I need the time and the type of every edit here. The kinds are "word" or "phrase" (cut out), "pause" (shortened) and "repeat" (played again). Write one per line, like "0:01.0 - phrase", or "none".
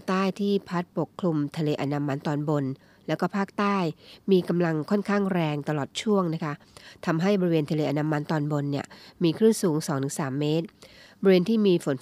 none